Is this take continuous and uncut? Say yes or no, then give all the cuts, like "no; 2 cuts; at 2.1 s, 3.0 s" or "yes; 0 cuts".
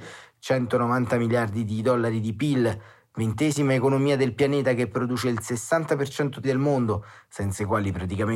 no; 1 cut; at 6.4 s